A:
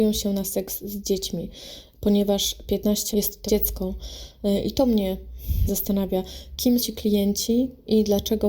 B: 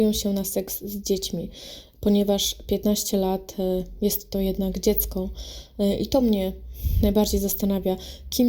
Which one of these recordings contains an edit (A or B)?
A